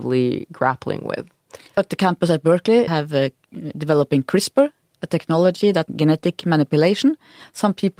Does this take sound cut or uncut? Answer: cut